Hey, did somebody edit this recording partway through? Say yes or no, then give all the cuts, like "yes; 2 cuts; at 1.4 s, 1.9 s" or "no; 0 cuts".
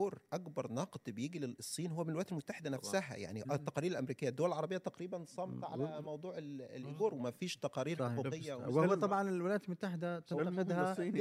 no; 0 cuts